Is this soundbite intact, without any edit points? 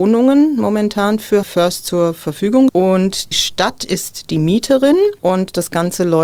no; 3 cuts; at 1.4 s, 2.7 s, 3.3 s

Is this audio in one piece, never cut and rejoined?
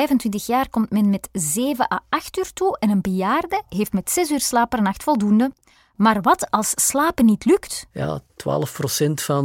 yes; 0 cuts

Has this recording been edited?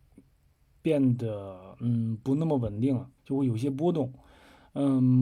yes; 1 cut; at 3.2 s

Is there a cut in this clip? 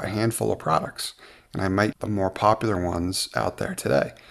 yes; 1 cut; at 1.9 s

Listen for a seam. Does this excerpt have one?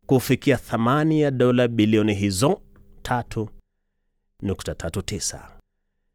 no; 0 cuts

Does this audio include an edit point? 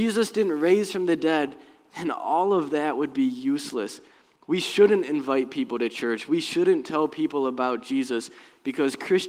no; 0 cuts

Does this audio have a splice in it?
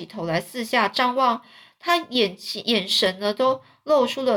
no; 0 cuts

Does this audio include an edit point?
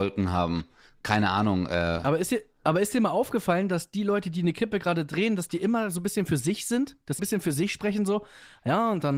yes; 1 cut; at 7.2 s

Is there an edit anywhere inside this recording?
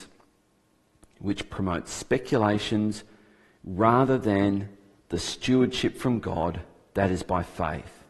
no; 0 cuts

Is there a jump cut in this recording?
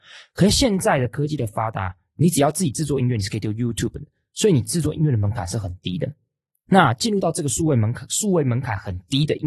no; 0 cuts

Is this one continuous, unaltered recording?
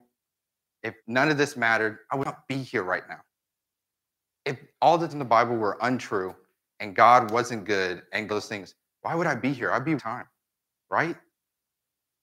no; 4 cuts; at 1.0 s, 5.1 s, 8.3 s, 10.0 s

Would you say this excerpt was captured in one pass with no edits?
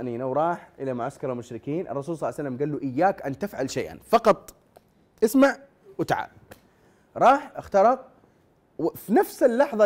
yes; 0 cuts

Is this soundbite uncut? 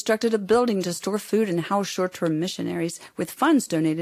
yes; 0 cuts

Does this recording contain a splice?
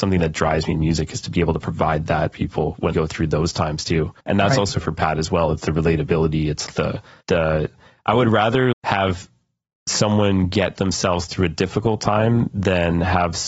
yes; 6 cuts; at 2.3 s, 2.9 s, 4.2 s, 6.7 s, 7.2 s, 8.7 s

